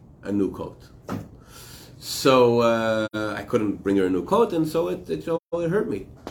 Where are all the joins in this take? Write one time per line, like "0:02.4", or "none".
none